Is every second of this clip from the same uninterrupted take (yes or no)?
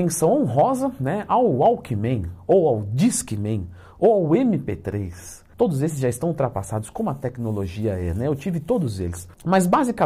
no